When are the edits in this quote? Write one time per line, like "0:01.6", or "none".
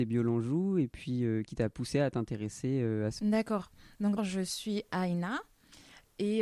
0:01.5
0:03.2
0:04.2